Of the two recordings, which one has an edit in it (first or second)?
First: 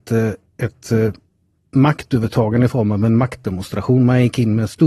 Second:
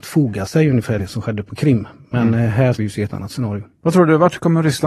second